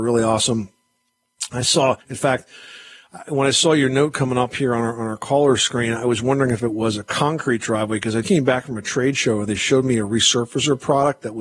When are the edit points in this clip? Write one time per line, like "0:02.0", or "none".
0:02.0
0:08.2